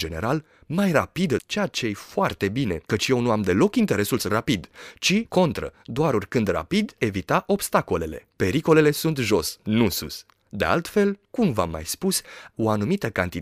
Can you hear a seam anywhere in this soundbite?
yes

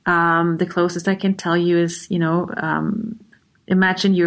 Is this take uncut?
yes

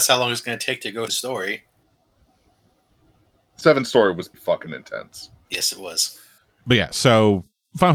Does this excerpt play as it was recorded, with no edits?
no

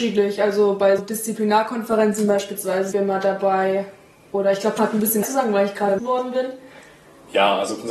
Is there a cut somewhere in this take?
yes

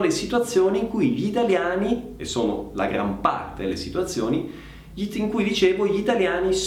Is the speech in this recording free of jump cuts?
yes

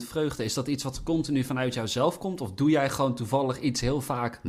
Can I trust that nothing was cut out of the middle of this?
yes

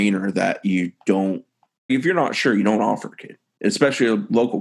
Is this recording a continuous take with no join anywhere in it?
no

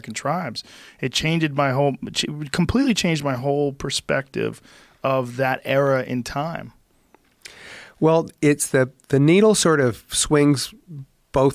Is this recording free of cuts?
yes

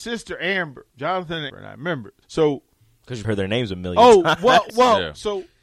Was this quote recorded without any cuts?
no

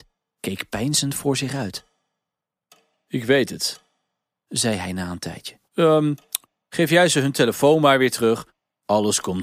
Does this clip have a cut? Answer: yes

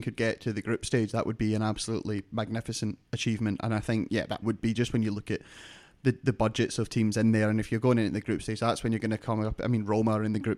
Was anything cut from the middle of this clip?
yes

